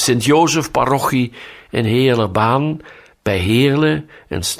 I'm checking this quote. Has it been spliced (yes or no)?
no